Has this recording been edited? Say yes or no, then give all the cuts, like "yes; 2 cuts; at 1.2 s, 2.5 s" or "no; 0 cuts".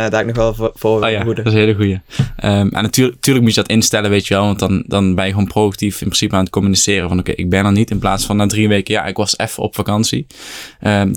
no; 0 cuts